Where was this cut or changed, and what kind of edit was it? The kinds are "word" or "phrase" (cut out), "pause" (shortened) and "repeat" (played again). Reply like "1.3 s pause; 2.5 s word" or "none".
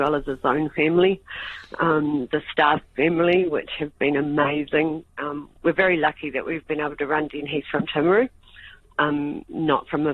none